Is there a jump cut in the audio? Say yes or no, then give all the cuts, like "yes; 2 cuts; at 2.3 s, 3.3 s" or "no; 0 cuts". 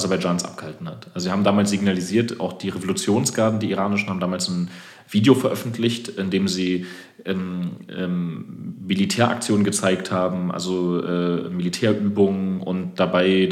no; 0 cuts